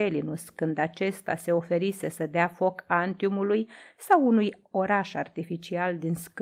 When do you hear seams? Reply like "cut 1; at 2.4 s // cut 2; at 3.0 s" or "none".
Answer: none